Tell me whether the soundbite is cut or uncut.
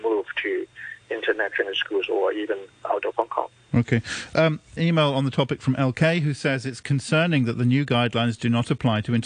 cut